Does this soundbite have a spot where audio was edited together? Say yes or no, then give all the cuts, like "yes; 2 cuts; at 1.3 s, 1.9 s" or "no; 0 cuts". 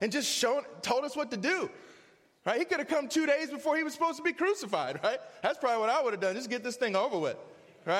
no; 0 cuts